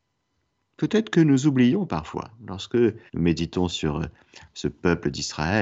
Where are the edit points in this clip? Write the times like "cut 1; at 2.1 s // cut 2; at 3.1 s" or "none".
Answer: cut 1; at 3.1 s